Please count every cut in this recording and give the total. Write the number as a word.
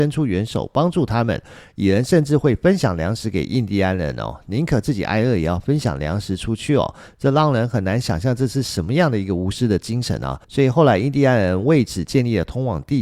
one